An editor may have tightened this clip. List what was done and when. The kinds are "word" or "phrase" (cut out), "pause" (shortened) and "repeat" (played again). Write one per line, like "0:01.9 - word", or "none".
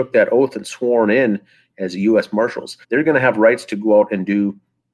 0:02.8 - pause